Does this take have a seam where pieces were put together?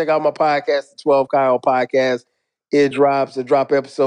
no; 0 cuts

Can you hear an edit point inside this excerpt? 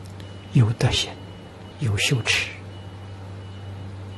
yes; 1 cut; at 1.7 s

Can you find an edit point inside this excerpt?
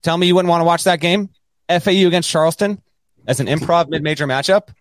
no; 0 cuts

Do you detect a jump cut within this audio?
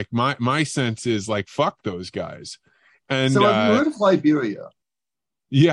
no; 0 cuts

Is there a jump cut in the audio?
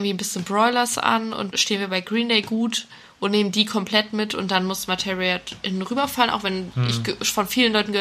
yes; 1 cut; at 1.5 s

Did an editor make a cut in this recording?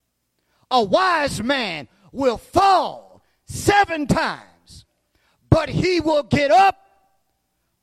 no; 0 cuts

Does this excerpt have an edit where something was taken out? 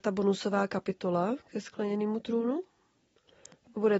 no; 0 cuts

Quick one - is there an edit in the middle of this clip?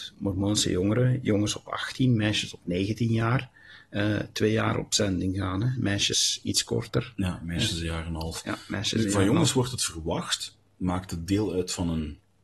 no; 0 cuts

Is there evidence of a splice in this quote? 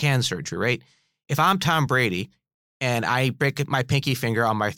no; 0 cuts

